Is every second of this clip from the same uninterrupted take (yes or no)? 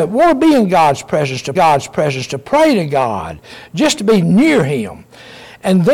no